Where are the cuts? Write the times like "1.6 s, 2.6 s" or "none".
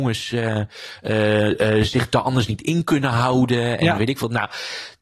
none